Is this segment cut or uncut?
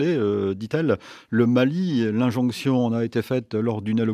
uncut